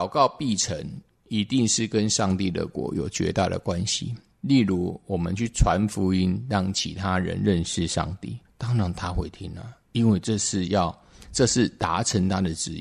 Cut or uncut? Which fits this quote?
cut